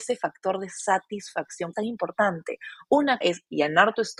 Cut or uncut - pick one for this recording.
cut